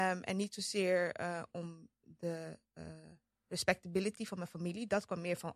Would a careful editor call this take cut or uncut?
uncut